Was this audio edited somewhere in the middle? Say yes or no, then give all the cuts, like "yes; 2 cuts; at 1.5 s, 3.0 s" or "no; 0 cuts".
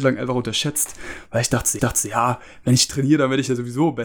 yes; 1 cut; at 1.8 s